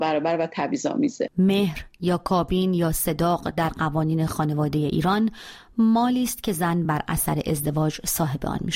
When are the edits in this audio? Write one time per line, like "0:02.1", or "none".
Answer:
none